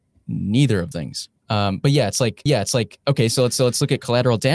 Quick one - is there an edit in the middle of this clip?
yes; 4 cuts; at 0.9 s, 1.4 s, 2.5 s, 3.6 s

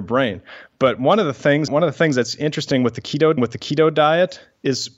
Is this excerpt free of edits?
no; 2 cuts; at 1.7 s, 3.4 s

